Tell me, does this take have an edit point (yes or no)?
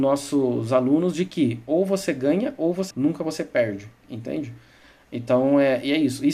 yes